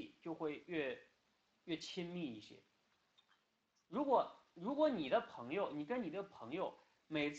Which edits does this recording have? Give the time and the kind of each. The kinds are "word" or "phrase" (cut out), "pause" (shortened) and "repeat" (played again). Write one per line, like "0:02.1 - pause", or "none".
none